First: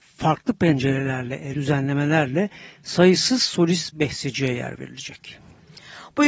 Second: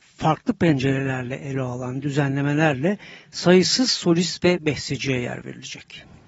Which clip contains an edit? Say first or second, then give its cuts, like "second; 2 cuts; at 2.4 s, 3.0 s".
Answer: first; 2 cuts; at 1.5 s, 3.9 s